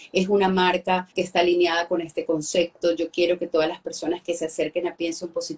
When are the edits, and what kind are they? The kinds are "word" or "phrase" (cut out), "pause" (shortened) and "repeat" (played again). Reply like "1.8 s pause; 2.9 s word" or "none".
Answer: 1.1 s pause